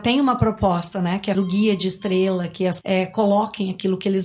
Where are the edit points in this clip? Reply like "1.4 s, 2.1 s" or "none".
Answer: 1.3 s, 2.8 s